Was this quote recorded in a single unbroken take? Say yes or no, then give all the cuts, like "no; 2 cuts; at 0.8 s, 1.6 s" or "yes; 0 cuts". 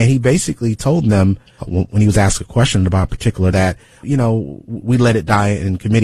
no; 3 cuts; at 1.6 s, 3.5 s, 4.0 s